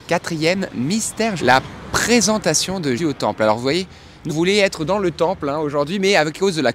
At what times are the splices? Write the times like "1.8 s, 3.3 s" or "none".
1.4 s, 3.0 s, 4.3 s